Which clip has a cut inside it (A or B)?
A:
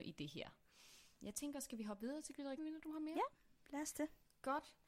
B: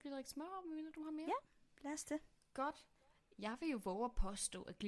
A